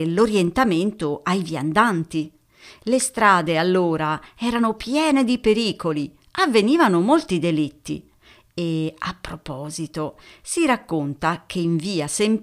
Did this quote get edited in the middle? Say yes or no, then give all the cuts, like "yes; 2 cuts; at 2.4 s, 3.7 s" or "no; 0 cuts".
no; 0 cuts